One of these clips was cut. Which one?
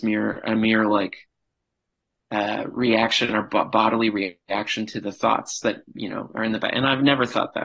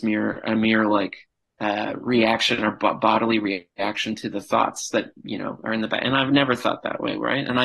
second; 1 cut; at 1.5 s

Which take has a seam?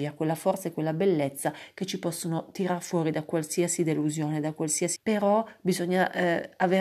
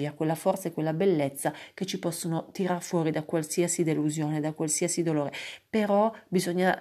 first; 1 cut; at 5.0 s

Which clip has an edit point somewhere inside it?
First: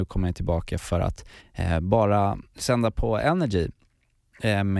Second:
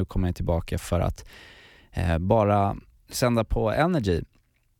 first; 2 cuts; at 1.4 s, 2.5 s

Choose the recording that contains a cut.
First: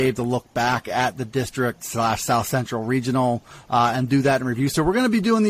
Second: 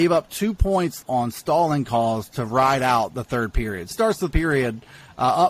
second; 3 cuts; at 1.0 s, 3.9 s, 4.3 s

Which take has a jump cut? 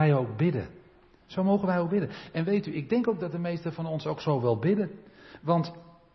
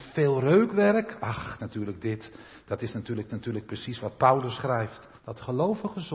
second; 3 cuts; at 1.6 s, 3.3 s, 5.2 s

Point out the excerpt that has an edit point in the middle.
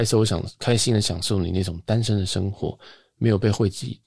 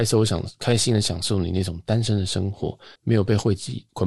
second; 1 cut; at 3.0 s

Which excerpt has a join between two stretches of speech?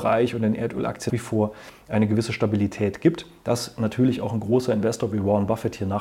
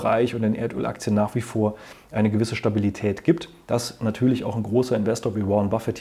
first; 1 cut; at 1.1 s

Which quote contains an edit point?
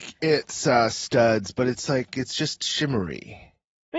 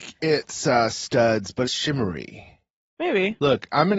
second; 1 cut; at 1.6 s

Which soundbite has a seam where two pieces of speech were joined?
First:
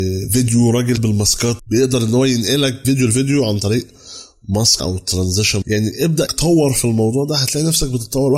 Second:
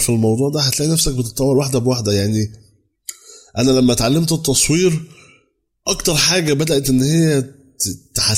first; 6 cuts; at 1.0 s, 1.6 s, 2.8 s, 4.8 s, 5.6 s, 6.3 s

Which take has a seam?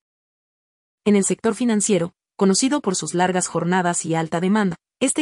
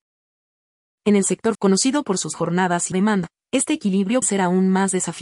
second; 4 cuts; at 1.5 s, 2.3 s, 2.9 s, 4.2 s

